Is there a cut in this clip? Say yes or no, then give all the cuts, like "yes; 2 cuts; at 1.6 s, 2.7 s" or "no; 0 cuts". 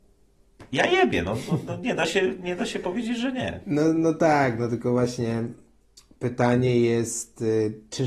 no; 0 cuts